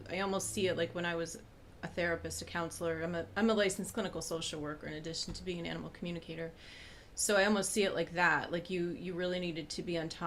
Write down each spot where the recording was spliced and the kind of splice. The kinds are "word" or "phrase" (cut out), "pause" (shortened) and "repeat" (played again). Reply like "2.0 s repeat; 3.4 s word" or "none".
none